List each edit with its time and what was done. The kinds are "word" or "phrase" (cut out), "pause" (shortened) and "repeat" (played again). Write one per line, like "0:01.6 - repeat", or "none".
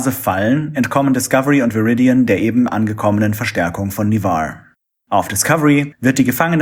none